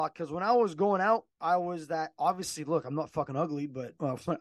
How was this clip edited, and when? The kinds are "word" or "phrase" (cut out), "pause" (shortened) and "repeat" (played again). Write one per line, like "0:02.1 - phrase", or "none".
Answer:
0:01.3 - pause